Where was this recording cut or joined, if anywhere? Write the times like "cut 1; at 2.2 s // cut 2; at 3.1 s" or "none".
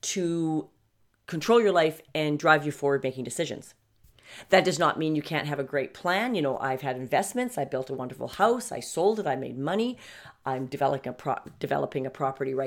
none